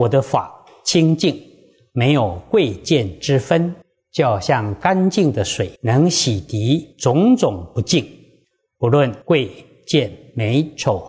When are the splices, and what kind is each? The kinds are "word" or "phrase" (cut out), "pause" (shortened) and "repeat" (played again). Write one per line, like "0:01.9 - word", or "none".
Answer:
0:03.8 - pause
0:05.8 - pause
0:06.9 - pause
0:09.2 - pause